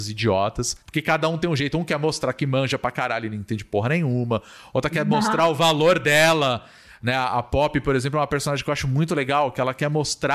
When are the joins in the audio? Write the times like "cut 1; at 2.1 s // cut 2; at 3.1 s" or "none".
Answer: none